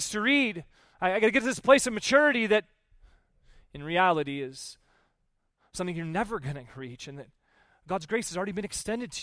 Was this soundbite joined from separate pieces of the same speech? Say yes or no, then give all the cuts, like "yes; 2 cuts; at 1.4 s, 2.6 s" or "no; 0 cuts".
no; 0 cuts